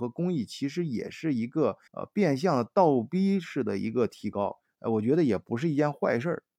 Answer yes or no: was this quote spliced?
yes